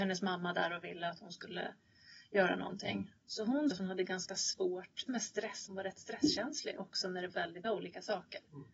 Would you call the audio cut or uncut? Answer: cut